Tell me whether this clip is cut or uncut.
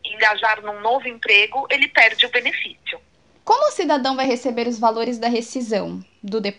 uncut